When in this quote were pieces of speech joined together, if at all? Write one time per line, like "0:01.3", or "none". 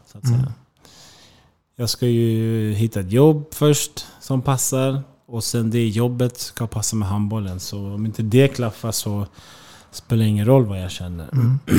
none